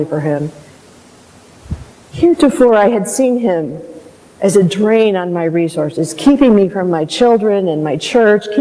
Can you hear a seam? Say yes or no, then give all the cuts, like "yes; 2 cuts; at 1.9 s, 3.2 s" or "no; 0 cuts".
no; 0 cuts